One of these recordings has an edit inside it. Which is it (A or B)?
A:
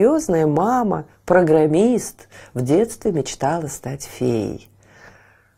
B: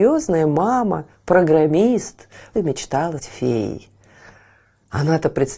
B